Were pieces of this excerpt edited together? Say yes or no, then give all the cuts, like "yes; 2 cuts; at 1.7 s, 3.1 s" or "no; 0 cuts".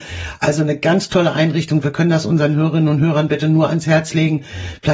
no; 0 cuts